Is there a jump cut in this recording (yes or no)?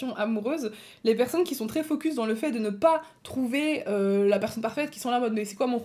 no